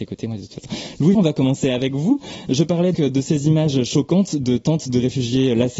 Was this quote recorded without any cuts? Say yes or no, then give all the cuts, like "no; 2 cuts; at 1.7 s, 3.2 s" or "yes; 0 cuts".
no; 2 cuts; at 1.1 s, 2.9 s